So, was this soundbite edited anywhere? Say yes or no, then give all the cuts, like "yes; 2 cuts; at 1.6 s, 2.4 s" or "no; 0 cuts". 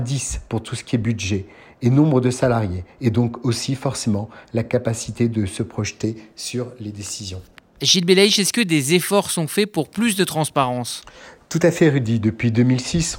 no; 0 cuts